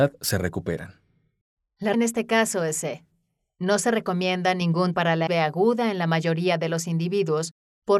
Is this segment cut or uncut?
cut